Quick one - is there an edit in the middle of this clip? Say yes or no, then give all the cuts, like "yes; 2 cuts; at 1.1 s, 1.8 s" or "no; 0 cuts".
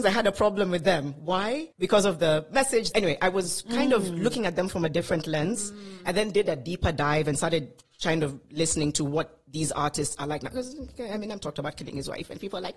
yes; 2 cuts; at 1.7 s, 2.9 s